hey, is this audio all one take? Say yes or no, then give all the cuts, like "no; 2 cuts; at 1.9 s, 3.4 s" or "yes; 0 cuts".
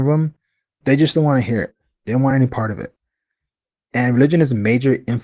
yes; 0 cuts